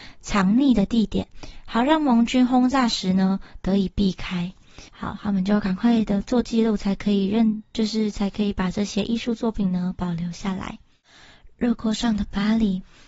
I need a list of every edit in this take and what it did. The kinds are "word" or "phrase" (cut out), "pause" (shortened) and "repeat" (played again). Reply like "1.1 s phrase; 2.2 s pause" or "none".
4.9 s pause

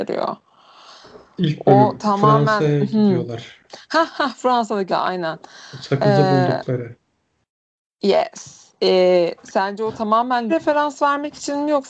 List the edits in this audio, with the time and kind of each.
4.9 s phrase; 8.7 s pause; 10.5 s word

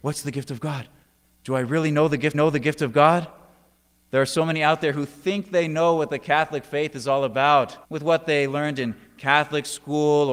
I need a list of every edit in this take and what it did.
2.3 s repeat; 7.8 s pause

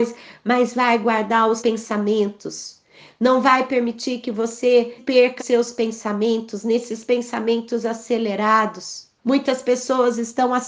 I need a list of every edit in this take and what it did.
1.6 s word; 5.0 s word; 5.4 s word; 9.2 s pause

